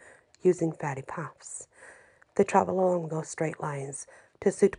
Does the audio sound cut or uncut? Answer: uncut